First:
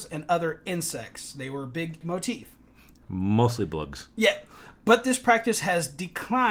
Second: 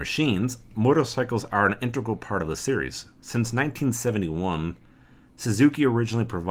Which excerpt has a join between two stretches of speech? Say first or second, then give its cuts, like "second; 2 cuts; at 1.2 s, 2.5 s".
first; 1 cut; at 2.0 s